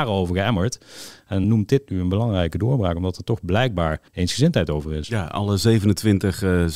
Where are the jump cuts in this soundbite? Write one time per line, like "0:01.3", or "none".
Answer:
0:01.4
0:04.1